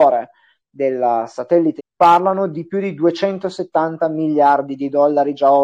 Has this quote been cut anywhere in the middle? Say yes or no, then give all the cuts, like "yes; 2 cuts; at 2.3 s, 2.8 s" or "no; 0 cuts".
yes; 1 cut; at 1.8 s